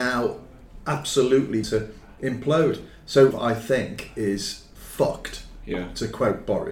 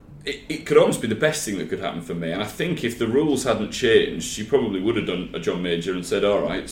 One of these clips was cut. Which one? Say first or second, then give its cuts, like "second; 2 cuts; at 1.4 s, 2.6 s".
first; 2 cuts; at 1.6 s, 3.3 s